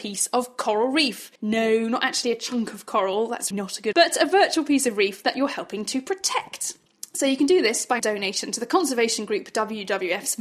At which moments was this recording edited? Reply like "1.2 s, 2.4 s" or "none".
1.4 s, 3.5 s, 3.9 s, 8.0 s